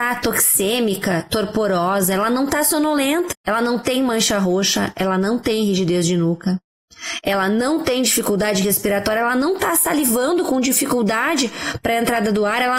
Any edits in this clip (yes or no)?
yes